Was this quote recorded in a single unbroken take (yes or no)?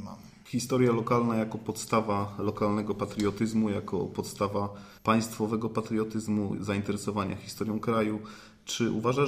no